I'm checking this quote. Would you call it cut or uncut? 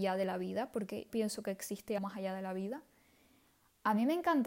cut